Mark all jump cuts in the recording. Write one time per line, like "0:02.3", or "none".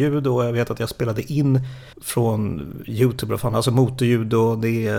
0:01.9